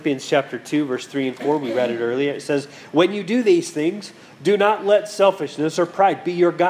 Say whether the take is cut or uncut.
uncut